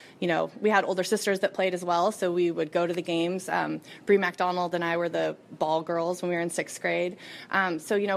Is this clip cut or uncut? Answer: uncut